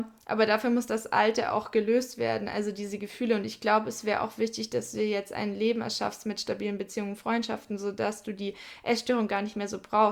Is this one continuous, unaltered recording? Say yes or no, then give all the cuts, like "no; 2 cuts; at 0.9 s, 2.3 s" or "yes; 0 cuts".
yes; 0 cuts